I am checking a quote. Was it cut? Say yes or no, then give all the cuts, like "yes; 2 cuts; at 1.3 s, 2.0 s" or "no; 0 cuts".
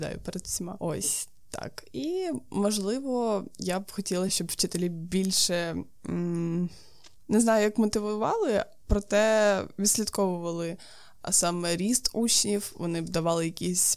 no; 0 cuts